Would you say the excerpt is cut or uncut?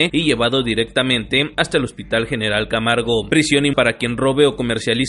cut